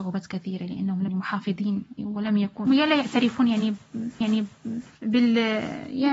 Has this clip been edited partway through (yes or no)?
yes